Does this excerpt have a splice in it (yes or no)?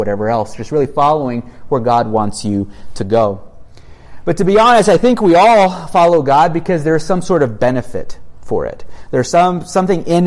no